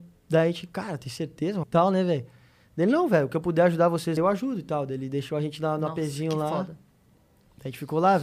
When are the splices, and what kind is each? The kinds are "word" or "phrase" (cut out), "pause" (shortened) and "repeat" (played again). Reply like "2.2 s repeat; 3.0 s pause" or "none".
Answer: 1.6 s word; 4.2 s word